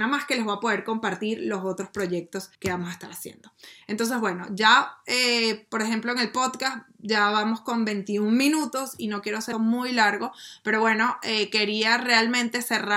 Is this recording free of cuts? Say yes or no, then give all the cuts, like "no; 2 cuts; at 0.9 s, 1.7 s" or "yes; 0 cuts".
no; 2 cuts; at 2.5 s, 9.5 s